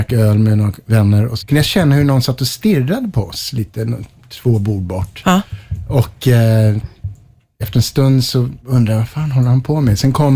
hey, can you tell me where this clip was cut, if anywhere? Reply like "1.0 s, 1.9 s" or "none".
1.4 s, 8.6 s